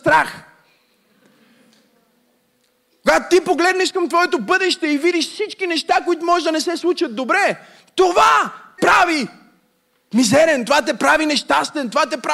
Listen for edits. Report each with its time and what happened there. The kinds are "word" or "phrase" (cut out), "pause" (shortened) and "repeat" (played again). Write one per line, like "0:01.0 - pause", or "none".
0:08.8 - word

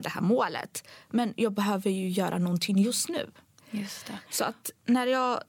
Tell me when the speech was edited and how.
none

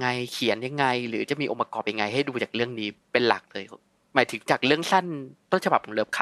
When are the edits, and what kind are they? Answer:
none

